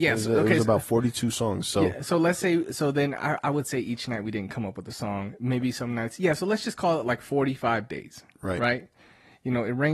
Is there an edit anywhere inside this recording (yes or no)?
no